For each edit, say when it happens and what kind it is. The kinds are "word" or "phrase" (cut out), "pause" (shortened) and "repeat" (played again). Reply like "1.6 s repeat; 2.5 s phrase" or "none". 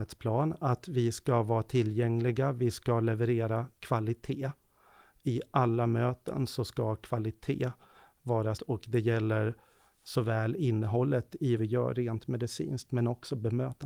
8.6 s word; 11.6 s word